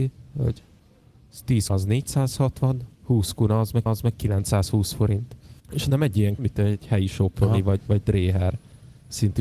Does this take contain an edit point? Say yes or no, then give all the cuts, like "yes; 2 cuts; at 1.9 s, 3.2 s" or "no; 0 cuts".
yes; 5 cuts; at 1.7 s, 2.9 s, 3.9 s, 5.6 s, 6.4 s